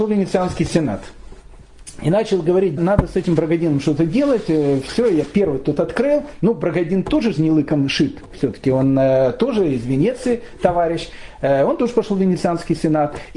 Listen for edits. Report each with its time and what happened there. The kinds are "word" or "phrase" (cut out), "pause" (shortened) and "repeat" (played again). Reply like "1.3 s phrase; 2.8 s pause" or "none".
2.8 s word